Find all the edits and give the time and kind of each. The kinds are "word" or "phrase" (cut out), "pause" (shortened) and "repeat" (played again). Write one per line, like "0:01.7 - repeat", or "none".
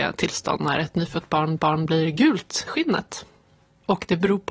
0:01.6 - repeat
0:02.7 - word